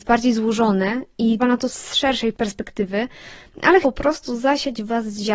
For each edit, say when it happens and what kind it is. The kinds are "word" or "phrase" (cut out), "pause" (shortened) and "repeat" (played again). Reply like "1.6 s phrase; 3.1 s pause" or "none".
1.4 s word; 1.7 s word; 3.8 s word